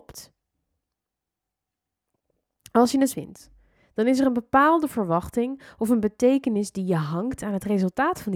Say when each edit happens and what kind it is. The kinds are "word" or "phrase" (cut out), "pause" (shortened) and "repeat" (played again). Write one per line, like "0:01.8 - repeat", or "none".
0:03.1 - word